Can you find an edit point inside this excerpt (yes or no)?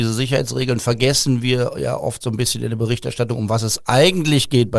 no